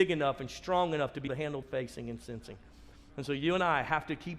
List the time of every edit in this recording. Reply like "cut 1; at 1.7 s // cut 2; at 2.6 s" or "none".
cut 1; at 1.3 s // cut 2; at 1.6 s